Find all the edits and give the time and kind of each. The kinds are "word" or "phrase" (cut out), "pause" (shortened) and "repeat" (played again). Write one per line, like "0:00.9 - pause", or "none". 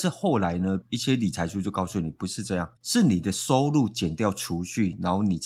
0:02.8 - pause